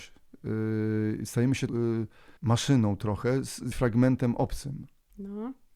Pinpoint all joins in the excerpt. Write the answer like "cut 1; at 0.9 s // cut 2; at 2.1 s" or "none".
cut 1; at 1.7 s // cut 2; at 2.4 s // cut 3; at 3.7 s